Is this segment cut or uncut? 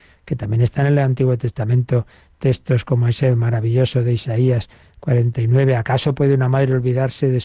uncut